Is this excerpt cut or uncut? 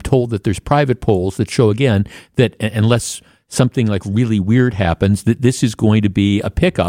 uncut